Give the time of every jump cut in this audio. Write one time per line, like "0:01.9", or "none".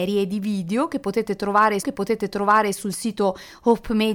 0:01.8